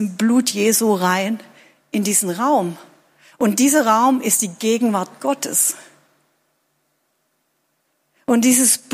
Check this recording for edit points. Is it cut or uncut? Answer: uncut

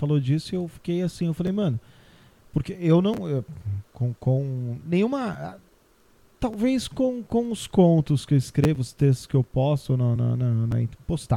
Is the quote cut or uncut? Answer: uncut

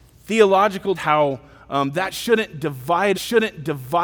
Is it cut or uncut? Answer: cut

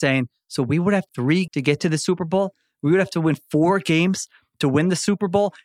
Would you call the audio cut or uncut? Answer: cut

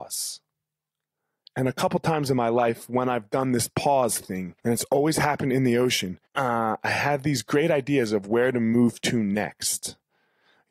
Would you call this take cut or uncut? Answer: cut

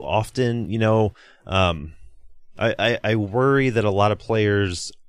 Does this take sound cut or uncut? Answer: uncut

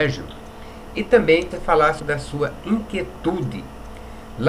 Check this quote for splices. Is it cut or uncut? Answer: cut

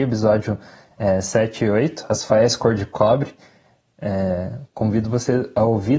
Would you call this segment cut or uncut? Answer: uncut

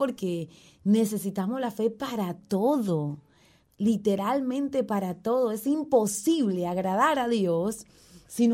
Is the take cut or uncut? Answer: uncut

